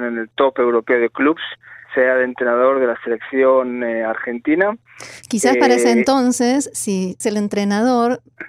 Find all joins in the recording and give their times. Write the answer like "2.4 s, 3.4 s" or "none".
1.8 s, 7.2 s